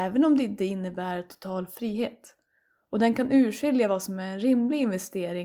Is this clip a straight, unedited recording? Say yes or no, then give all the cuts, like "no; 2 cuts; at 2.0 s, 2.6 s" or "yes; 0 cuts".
yes; 0 cuts